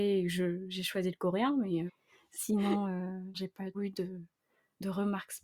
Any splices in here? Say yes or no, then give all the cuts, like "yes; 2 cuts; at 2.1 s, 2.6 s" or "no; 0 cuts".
yes; 3 cuts; at 1.9 s, 3.3 s, 3.7 s